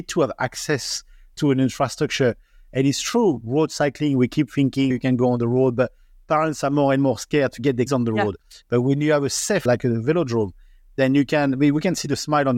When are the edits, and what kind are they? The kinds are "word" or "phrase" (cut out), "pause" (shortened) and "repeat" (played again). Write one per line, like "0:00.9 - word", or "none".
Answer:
0:04.9 - word
0:07.9 - word
0:09.7 - word